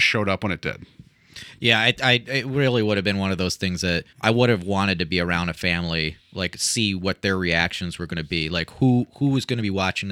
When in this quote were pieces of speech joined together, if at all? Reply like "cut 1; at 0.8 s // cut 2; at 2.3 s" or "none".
cut 1; at 4.1 s